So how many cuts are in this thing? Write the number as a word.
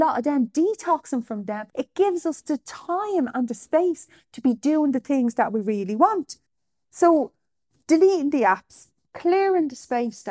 three